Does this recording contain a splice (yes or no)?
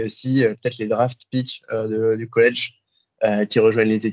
no